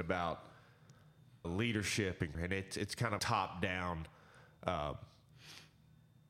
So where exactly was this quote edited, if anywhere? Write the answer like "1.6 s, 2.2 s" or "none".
1.4 s, 2.3 s, 3.2 s